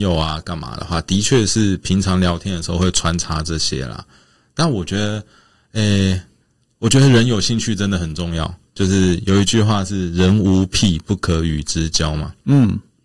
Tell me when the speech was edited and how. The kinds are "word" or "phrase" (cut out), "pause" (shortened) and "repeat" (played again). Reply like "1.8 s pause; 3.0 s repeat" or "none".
none